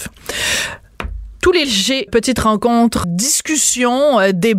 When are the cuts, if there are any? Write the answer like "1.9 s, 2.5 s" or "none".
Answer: 1.6 s, 2.1 s, 3.0 s